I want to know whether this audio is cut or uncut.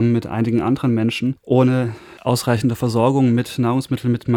uncut